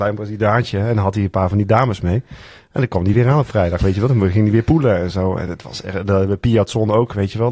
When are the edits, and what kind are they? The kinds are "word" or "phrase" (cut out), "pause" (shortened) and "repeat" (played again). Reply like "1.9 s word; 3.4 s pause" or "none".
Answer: none